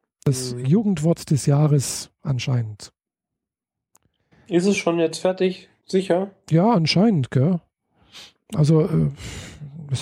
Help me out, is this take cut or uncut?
uncut